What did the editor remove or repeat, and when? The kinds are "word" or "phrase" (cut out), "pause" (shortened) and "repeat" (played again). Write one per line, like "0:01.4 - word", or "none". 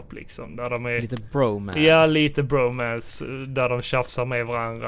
none

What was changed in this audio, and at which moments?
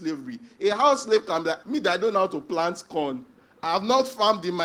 0:01.6 - word

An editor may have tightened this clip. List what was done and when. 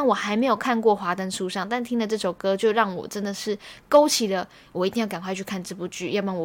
none

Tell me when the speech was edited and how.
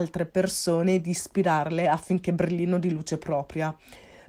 none

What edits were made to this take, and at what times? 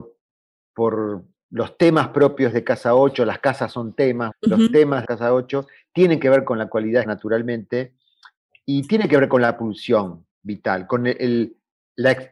0:04.3 - word
0:05.0 - phrase
0:07.0 - word

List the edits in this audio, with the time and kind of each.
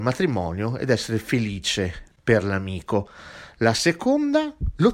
0:02.1 - pause

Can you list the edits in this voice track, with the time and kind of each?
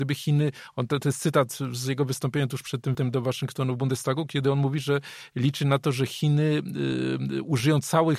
0:02.9 - word

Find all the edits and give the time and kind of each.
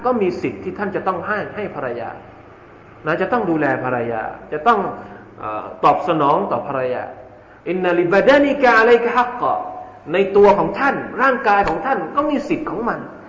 0:07.6 - pause

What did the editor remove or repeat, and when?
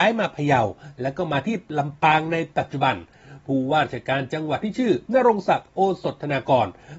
0:05.1 - pause

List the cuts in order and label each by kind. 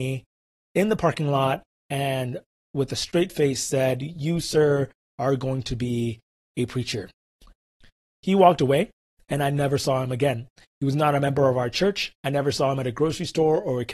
none

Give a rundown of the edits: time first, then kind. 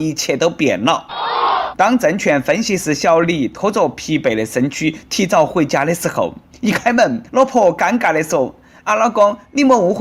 0:07.3 - pause
0:08.9 - phrase

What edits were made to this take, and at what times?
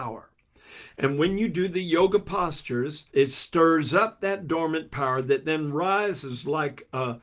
0:03.1 - pause

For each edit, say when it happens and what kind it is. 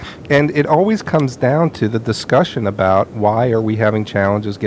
none

